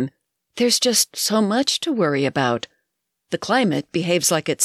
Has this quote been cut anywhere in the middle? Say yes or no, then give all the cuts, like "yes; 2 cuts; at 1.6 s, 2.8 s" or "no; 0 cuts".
no; 0 cuts